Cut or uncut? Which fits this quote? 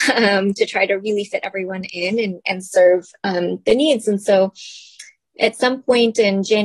uncut